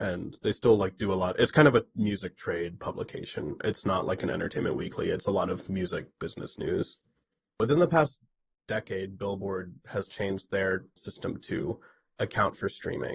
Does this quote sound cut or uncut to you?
cut